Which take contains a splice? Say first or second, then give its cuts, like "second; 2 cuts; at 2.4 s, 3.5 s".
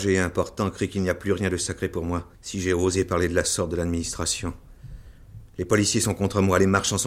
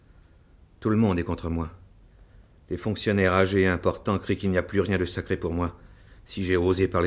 first; 1 cut; at 2.3 s